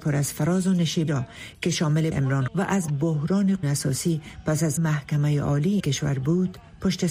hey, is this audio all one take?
no; 7 cuts; at 1.1 s, 2.1 s, 2.5 s, 2.9 s, 3.6 s, 4.8 s, 5.8 s

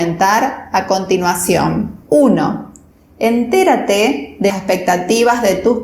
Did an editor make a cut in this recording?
yes; 2 cuts; at 2.0 s, 4.5 s

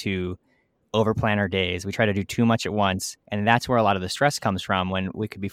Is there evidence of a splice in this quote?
yes; 1 cut; at 3.2 s

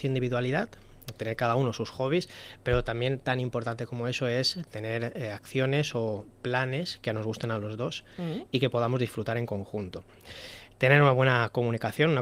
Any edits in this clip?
no; 0 cuts

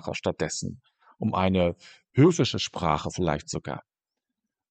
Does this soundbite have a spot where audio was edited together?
no; 0 cuts

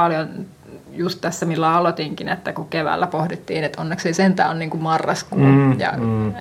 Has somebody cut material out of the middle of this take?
no; 0 cuts

